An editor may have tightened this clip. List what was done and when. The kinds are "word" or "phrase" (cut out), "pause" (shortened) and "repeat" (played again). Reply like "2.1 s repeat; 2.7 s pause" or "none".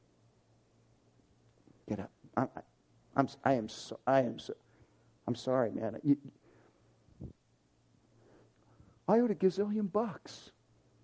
none